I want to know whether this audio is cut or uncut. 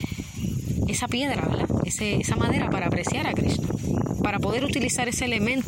uncut